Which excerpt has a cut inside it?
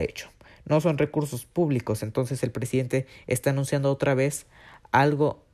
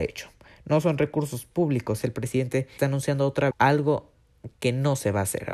second; 3 cuts; at 2.0 s, 2.8 s, 3.5 s

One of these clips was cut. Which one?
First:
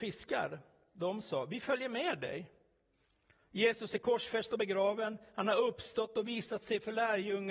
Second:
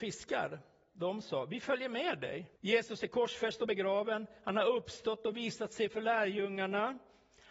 second; 1 cut; at 2.6 s

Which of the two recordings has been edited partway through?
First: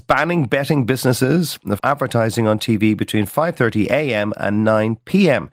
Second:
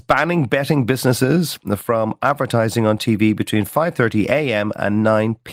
first; 1 cut; at 1.8 s

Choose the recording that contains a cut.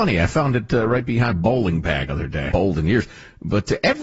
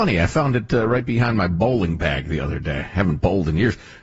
first; 3 cuts; at 1.3 s, 2.1 s, 2.5 s

